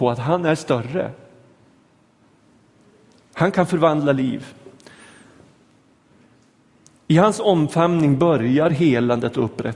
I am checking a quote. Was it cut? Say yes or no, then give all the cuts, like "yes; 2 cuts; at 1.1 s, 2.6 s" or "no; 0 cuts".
no; 0 cuts